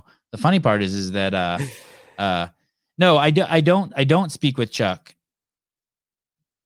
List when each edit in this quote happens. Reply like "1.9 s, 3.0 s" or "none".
none